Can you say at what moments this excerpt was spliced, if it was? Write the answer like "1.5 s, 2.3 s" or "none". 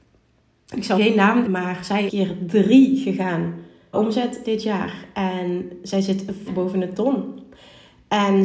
1.0 s, 1.4 s, 2.1 s, 3.9 s, 6.5 s

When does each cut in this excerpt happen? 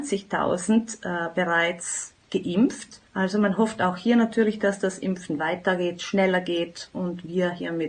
3.1 s

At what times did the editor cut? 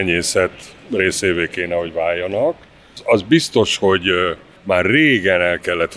none

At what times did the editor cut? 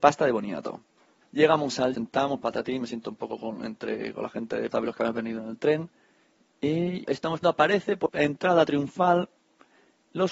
1.2 s, 1.9 s, 4.7 s, 7.0 s, 7.4 s, 8.1 s

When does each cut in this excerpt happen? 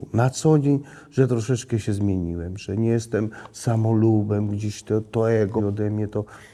5.6 s

